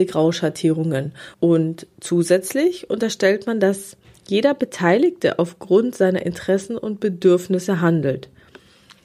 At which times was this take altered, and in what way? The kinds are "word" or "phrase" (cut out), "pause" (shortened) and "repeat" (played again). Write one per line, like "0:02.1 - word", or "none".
0:01.3 - pause
0:04.0 - pause